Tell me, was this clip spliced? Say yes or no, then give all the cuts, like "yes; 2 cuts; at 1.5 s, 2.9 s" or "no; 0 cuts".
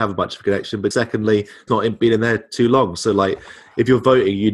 yes; 2 cuts; at 0.9 s, 1.7 s